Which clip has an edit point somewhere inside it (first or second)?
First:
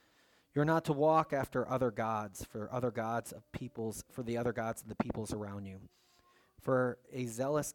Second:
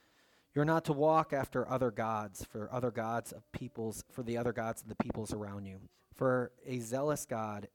second